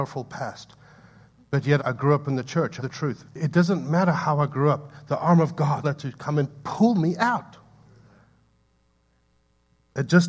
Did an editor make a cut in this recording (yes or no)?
yes